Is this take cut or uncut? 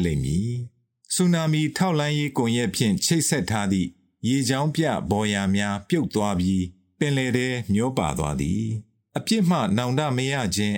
uncut